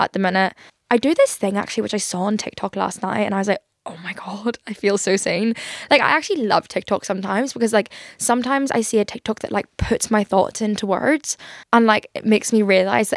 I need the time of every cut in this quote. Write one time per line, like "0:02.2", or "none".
0:11.6